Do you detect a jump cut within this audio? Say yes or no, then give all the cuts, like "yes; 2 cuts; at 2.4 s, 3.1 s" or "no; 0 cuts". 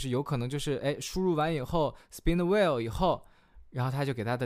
no; 0 cuts